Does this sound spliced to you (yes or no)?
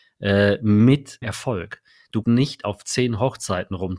yes